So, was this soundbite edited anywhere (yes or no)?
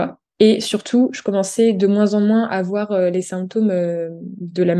no